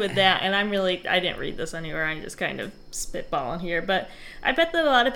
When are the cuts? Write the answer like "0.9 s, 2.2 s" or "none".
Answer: none